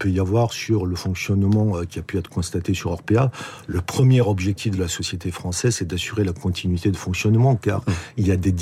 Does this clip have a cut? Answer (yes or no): no